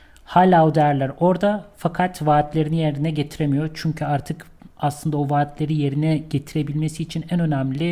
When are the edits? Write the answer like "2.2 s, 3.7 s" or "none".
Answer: 4.7 s